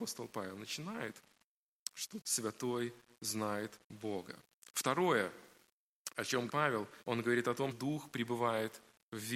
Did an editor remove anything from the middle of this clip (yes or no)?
yes